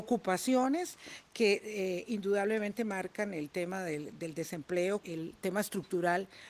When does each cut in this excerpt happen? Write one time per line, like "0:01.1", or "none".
0:05.0